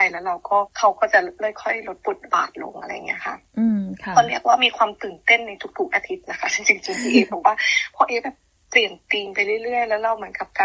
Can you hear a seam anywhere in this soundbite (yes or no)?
no